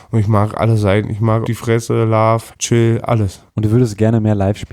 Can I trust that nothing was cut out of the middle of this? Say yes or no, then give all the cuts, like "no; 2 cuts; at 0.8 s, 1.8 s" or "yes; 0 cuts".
no; 3 cuts; at 1.4 s, 2.5 s, 3.5 s